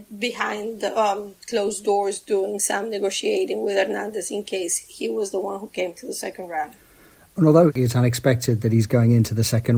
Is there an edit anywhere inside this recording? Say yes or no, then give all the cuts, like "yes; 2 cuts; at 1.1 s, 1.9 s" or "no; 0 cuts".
no; 0 cuts